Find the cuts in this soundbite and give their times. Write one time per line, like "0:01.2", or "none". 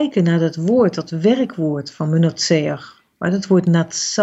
none